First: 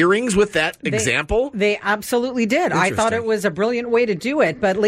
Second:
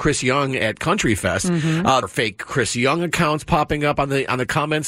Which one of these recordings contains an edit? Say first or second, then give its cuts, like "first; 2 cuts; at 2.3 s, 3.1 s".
second; 1 cut; at 2.0 s